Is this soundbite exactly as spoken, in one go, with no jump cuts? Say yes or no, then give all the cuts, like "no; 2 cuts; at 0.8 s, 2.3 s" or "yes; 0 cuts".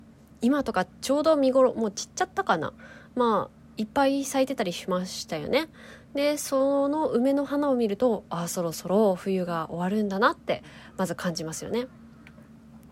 no; 2 cuts; at 0.9 s, 3.6 s